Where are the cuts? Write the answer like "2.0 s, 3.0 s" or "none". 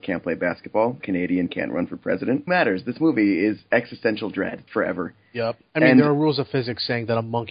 1.0 s, 2.5 s, 4.7 s, 5.7 s